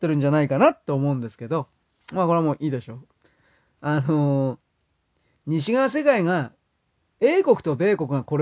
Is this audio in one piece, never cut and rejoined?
yes; 0 cuts

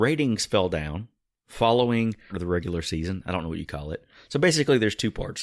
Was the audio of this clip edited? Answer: yes; 1 cut; at 2.3 s

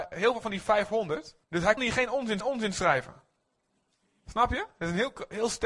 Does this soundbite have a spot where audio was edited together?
yes; 3 cuts; at 1.4 s, 1.8 s, 2.4 s

